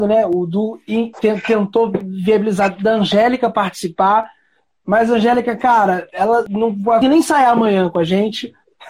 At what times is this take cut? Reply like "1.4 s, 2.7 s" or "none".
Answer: 1.1 s, 6.5 s, 7.0 s